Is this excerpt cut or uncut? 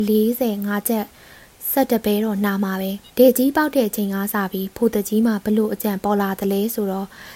cut